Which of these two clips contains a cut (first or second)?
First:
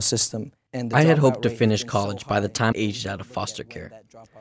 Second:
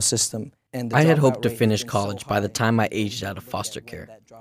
first